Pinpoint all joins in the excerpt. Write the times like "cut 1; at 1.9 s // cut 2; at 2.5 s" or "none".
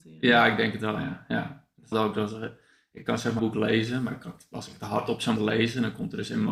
cut 1; at 1.9 s // cut 2; at 3.4 s // cut 3; at 5.4 s